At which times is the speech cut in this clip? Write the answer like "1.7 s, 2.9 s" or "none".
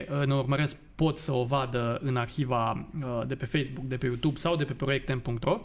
none